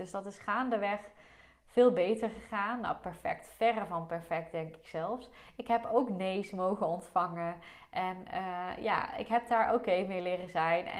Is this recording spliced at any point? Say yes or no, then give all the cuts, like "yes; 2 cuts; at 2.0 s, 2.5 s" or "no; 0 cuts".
no; 0 cuts